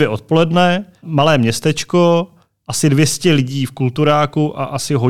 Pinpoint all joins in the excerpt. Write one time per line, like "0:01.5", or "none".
none